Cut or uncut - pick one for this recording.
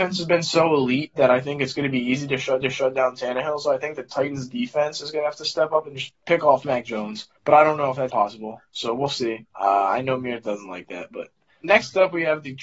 cut